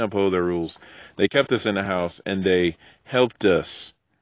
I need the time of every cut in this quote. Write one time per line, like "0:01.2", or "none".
none